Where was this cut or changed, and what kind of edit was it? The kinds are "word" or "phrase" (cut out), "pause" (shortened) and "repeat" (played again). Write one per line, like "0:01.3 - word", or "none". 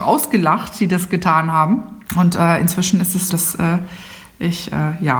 0:02.1 - pause
0:03.3 - word